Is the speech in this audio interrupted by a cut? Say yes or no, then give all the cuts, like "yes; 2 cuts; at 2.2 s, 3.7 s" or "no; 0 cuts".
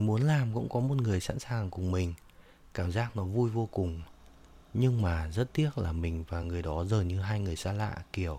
no; 0 cuts